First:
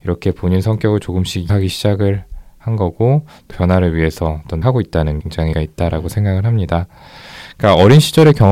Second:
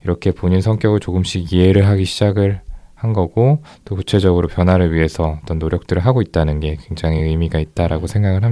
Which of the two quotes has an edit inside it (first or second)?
first